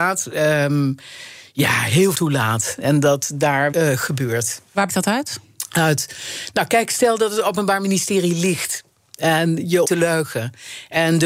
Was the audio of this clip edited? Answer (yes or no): yes